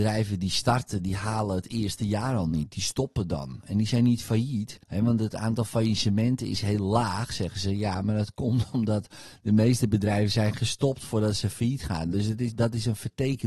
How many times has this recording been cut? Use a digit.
1